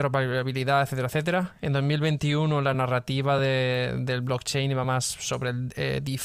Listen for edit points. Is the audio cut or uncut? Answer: uncut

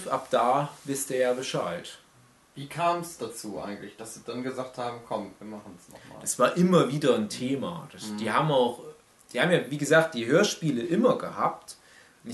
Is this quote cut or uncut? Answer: uncut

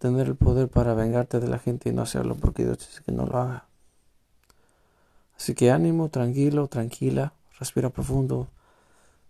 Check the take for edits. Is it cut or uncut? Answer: uncut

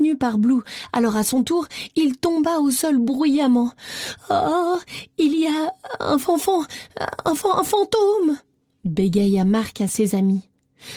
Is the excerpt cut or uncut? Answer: uncut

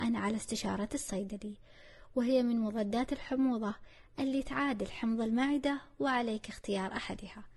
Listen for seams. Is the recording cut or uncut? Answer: uncut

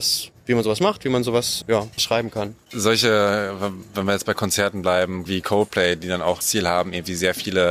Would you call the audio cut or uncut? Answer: cut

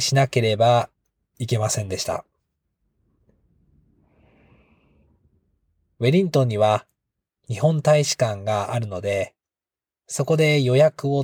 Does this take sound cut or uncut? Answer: uncut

